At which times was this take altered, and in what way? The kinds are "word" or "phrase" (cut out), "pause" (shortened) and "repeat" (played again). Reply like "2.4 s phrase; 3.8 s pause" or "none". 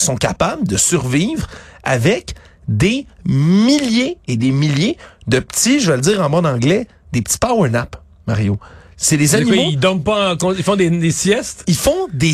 none